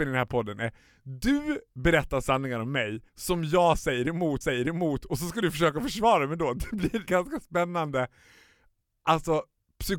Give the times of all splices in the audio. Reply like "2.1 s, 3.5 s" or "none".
3.1 s, 4.4 s, 7.1 s